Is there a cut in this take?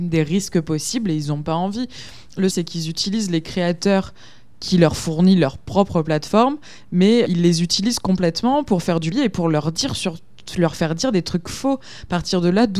yes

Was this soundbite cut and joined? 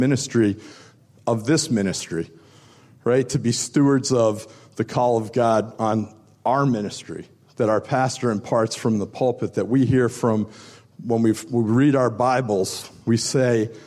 no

